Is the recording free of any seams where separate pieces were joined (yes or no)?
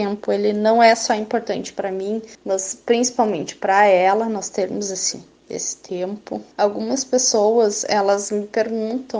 no